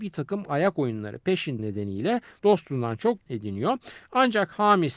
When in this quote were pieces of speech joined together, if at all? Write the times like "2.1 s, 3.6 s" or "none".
1.6 s, 3.3 s

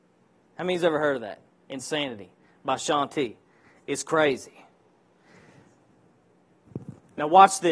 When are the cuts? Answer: none

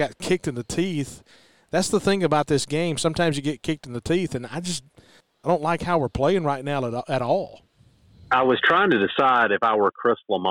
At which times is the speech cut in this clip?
none

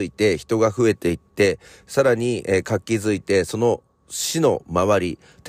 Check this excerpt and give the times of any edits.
none

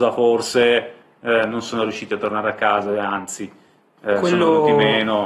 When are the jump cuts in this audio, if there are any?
none

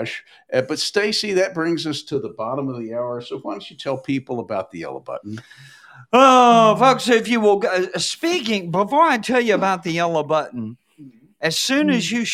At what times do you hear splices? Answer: none

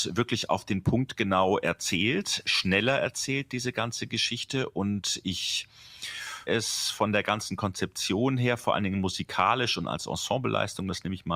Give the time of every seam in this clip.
6.5 s

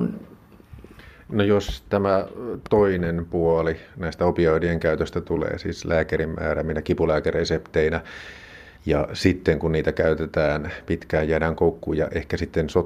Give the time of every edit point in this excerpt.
8.8 s

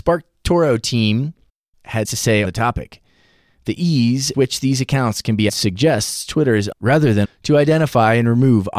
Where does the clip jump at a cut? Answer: 2.0 s, 2.4 s, 4.3 s, 5.5 s, 6.7 s, 7.2 s

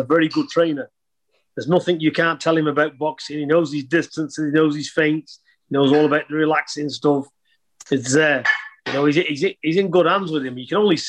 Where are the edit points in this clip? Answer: none

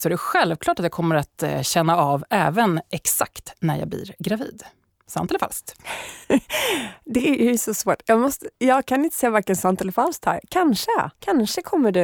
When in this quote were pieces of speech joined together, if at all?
4.9 s, 6.2 s, 11.1 s

